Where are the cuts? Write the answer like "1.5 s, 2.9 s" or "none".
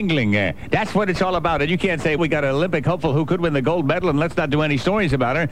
2.2 s